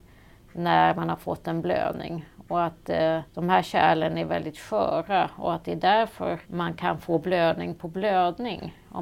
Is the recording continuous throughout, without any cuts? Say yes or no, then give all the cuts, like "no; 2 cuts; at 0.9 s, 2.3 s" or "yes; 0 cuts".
no; 2 cuts; at 3.3 s, 6.4 s